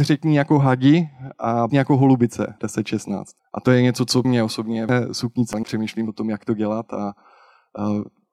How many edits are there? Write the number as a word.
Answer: six